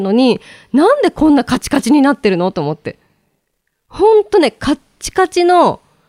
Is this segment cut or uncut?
uncut